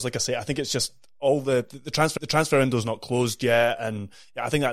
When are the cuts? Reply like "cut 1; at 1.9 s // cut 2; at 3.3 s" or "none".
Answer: cut 1; at 2.2 s